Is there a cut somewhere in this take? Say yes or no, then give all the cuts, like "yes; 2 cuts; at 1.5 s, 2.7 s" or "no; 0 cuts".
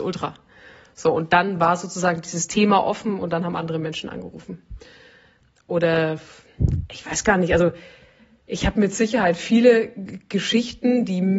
no; 0 cuts